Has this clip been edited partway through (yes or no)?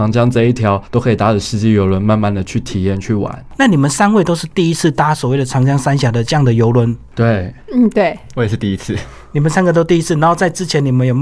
yes